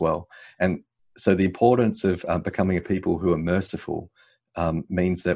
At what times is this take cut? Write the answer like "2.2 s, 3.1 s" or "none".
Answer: none